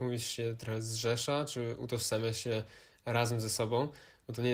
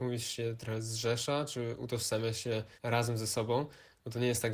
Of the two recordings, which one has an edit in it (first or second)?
second